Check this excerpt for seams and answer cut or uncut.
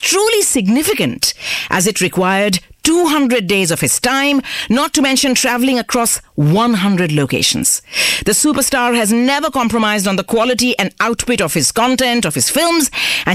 uncut